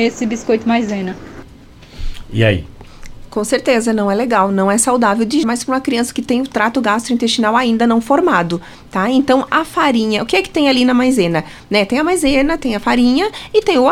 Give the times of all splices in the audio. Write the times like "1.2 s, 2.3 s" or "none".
5.4 s